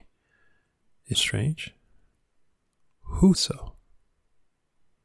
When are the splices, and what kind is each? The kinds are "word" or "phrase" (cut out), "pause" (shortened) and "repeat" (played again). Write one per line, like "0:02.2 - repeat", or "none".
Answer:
0:01.1 - word
0:03.3 - word